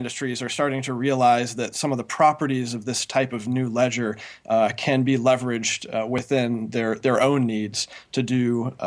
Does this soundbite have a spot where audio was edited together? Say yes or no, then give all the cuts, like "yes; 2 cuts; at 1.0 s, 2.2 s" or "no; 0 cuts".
no; 0 cuts